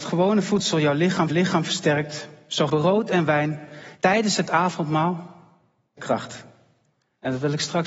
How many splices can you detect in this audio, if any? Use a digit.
4